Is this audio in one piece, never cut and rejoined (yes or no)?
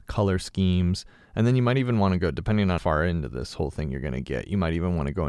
no